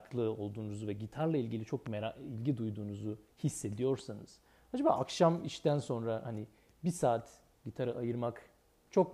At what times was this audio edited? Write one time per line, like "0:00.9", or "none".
none